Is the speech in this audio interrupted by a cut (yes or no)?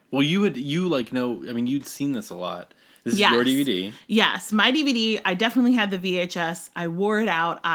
no